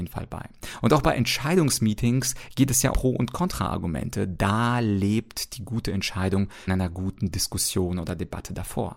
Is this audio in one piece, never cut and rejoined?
no; 2 cuts; at 2.9 s, 6.7 s

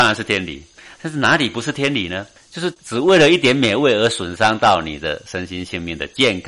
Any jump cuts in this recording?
yes; 1 cut; at 2.4 s

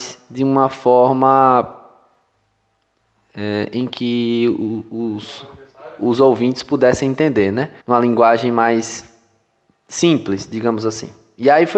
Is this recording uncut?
no; 1 cut; at 7.8 s

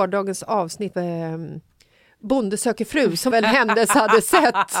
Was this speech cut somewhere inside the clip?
yes; 2 cuts; at 0.9 s, 3.3 s

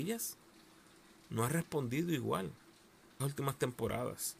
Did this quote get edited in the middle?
yes; 1 cut; at 3.2 s

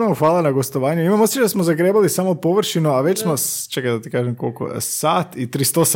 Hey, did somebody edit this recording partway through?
no; 0 cuts

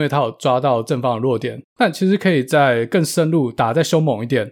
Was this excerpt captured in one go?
yes; 0 cuts

